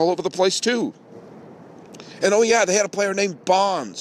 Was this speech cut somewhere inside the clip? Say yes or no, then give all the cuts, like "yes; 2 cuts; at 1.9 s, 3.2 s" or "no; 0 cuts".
no; 0 cuts